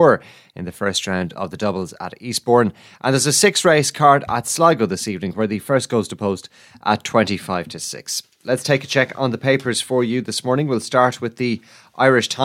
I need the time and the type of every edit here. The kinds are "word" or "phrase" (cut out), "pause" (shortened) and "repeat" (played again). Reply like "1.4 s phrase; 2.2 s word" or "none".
none

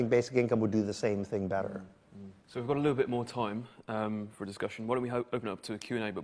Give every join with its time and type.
2.4 s pause

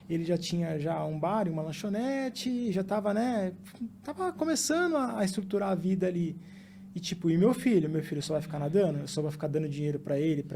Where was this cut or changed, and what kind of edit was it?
none

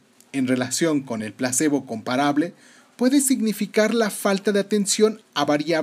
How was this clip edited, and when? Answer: none

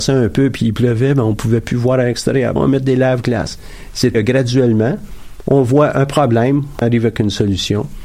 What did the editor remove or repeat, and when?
2.6 s word; 4.1 s word; 6.8 s word

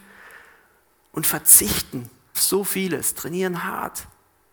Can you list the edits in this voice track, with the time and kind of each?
2.3 s word

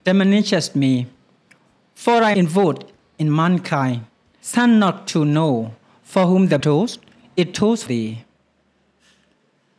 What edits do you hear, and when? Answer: 2.3 s word; 4.4 s word; 6.6 s word; 7.9 s word

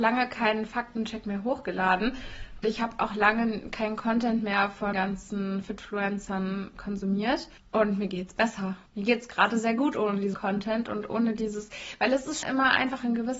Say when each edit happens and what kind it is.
2.6 s word; 4.9 s word; 7.6 s pause; 8.9 s pause; 10.3 s word; 12.4 s word

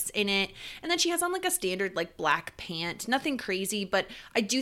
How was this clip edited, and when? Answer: none

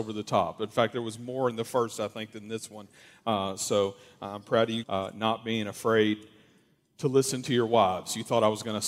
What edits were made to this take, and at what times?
4.8 s phrase

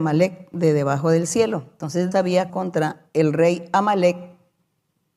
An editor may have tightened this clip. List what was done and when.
2.1 s word; 2.5 s phrase

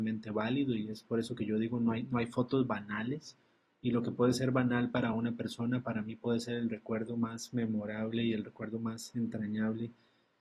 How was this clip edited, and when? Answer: none

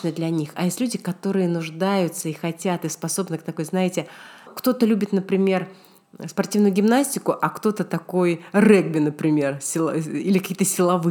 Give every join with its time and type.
4.5 s word

